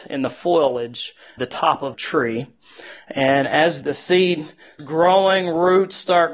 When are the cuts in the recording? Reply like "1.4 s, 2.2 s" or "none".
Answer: 1.4 s, 1.9 s, 3.8 s, 4.8 s